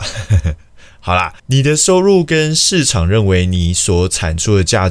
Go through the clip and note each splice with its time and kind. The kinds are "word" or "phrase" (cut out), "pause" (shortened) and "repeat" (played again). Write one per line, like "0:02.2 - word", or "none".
0:01.4 - pause